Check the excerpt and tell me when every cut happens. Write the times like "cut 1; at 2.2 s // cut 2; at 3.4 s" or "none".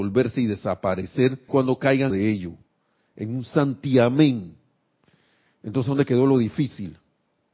cut 1; at 1.5 s // cut 2; at 2.1 s